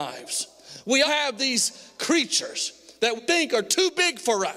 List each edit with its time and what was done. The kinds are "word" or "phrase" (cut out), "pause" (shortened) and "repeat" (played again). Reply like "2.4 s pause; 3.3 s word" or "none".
1.0 s word; 3.2 s word